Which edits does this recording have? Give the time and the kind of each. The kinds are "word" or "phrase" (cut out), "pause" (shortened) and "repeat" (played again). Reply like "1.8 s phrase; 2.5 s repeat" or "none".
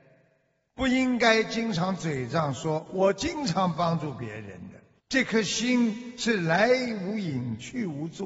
5.0 s pause

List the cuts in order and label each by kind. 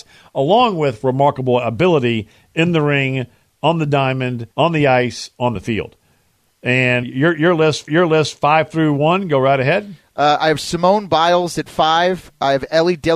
4.5 s pause; 7.0 s word; 7.9 s repeat

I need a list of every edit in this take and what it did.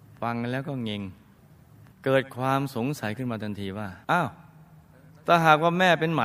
1.6 s pause; 4.0 s pause

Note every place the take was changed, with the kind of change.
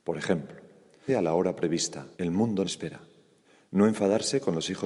1.1 s word; 2.1 s pause; 2.6 s word; 3.4 s pause

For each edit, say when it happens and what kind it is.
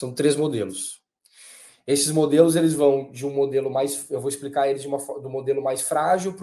none

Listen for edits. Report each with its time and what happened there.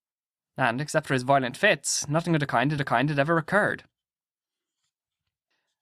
2.8 s repeat

